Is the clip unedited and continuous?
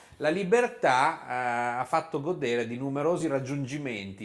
yes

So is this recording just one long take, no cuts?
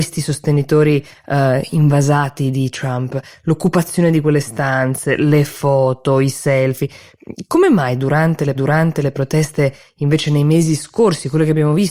no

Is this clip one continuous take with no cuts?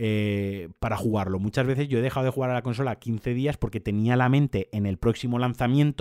yes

